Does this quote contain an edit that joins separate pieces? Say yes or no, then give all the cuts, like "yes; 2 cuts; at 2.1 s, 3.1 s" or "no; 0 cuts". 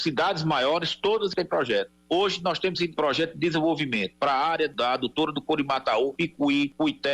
no; 0 cuts